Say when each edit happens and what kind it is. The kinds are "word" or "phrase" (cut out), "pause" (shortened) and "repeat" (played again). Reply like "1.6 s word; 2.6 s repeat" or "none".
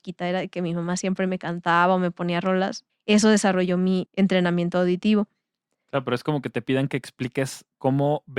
2.9 s word; 4.0 s phrase